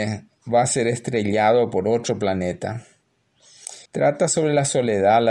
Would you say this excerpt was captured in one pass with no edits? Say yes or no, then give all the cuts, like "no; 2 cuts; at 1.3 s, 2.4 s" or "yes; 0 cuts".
no; 1 cut; at 3.9 s